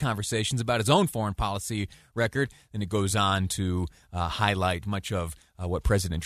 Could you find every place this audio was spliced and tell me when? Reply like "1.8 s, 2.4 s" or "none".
none